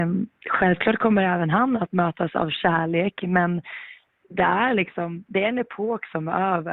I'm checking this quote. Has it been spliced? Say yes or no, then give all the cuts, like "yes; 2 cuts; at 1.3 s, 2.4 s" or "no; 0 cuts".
no; 0 cuts